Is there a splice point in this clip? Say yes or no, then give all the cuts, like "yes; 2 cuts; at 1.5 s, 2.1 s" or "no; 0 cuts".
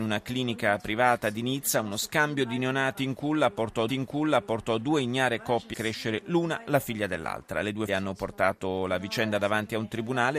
yes; 3 cuts; at 3.9 s, 5.7 s, 7.9 s